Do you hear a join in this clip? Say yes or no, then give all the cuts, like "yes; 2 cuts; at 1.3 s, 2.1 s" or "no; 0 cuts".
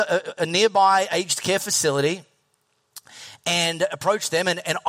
no; 0 cuts